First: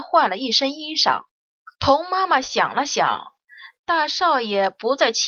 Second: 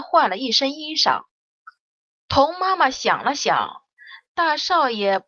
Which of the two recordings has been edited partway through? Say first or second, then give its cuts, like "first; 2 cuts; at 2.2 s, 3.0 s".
first; 1 cut; at 1.7 s